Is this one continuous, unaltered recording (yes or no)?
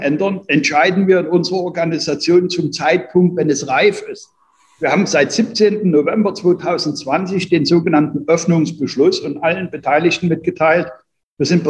yes